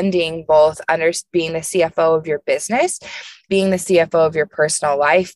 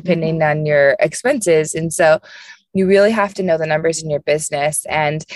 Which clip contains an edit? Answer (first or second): first